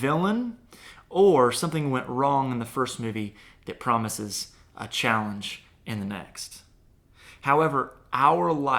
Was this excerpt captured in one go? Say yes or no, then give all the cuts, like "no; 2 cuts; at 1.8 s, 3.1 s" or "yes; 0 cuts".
yes; 0 cuts